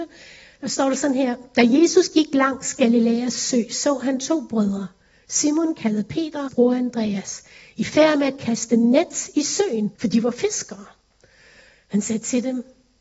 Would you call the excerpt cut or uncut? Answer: cut